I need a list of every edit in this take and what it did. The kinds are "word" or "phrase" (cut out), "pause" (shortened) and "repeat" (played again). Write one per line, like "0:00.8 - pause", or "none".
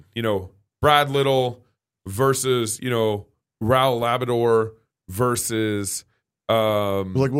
none